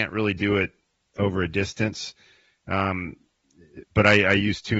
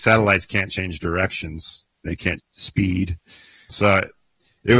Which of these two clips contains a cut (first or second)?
second